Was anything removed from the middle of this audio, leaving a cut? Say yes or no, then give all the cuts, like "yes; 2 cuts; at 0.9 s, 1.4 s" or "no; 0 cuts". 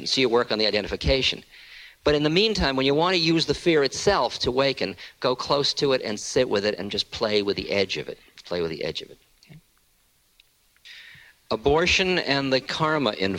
no; 0 cuts